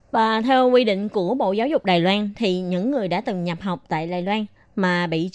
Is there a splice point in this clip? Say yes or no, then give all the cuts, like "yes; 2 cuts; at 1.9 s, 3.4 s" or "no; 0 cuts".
no; 0 cuts